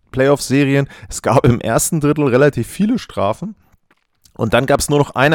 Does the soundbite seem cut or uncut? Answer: uncut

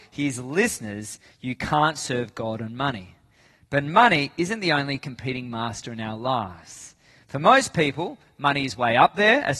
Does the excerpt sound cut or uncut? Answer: uncut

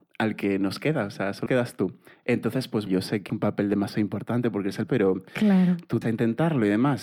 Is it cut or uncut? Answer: cut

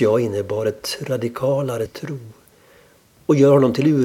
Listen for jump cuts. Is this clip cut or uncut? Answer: cut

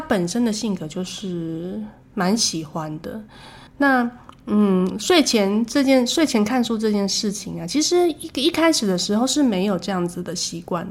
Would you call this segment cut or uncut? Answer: cut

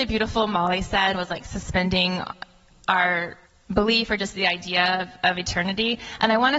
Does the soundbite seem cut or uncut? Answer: cut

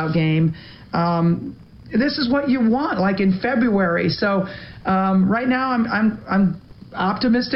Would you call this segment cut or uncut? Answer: uncut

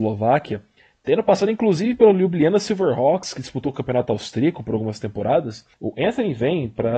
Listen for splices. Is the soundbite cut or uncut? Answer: cut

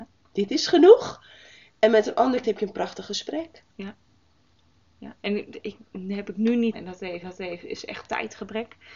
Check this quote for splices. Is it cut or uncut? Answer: cut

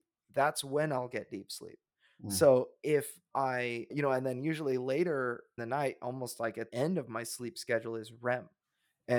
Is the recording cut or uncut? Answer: cut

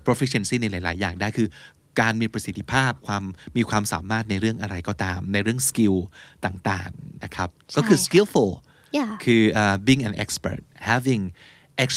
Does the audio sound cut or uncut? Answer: uncut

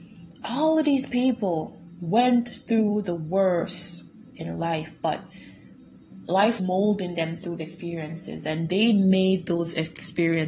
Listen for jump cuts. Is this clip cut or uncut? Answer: cut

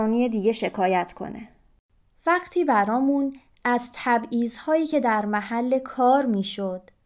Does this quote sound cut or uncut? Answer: uncut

